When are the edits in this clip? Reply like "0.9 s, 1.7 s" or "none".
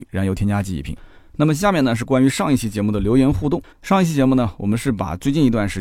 3.7 s